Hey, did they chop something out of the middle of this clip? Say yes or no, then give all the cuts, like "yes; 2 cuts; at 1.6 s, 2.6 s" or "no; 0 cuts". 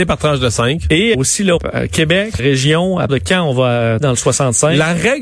yes; 5 cuts; at 1.1 s, 1.6 s, 2.4 s, 3.1 s, 4.0 s